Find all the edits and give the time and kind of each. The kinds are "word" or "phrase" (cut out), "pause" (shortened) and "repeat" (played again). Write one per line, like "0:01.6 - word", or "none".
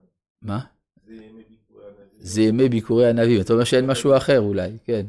none